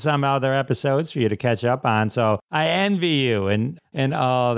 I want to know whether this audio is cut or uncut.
uncut